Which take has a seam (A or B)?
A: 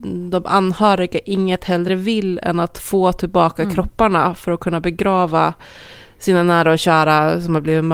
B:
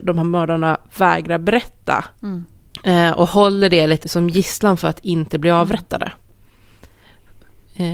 B